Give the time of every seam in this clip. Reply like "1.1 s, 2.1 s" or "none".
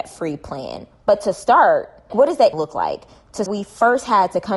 2.1 s, 2.5 s, 3.5 s